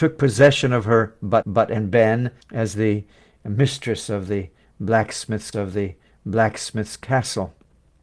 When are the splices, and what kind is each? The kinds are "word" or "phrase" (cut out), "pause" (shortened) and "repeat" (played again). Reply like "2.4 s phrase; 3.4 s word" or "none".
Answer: 1.4 s repeat; 2.4 s pause; 5.5 s repeat